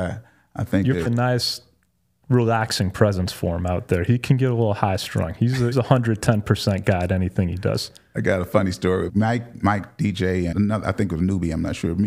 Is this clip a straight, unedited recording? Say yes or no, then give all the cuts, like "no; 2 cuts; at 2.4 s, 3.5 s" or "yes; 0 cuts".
no; 4 cuts; at 1.1 s, 5.7 s, 9.1 s, 10.5 s